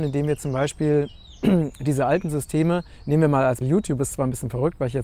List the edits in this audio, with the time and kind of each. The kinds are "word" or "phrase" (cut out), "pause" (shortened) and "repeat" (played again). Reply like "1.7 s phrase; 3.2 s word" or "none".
3.6 s word